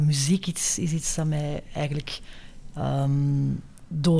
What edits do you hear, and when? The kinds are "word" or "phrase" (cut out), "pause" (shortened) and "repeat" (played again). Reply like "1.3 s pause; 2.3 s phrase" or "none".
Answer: none